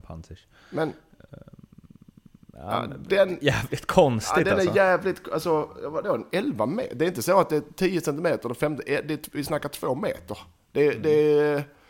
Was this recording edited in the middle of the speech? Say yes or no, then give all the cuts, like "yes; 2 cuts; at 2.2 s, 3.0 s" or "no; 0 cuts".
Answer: no; 0 cuts